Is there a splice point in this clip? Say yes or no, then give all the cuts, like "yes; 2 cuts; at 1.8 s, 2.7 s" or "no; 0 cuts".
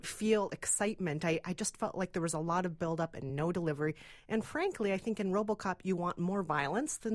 no; 0 cuts